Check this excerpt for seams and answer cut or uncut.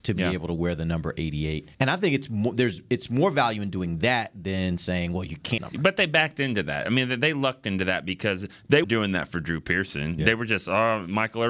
cut